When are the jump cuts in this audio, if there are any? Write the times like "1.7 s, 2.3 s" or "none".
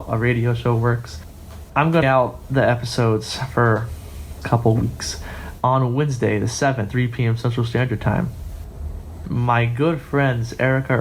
2.0 s, 4.4 s, 6.9 s